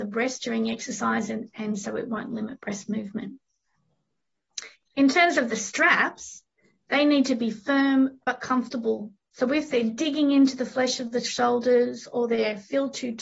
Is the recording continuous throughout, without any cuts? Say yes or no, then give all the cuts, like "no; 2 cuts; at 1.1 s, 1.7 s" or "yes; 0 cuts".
yes; 0 cuts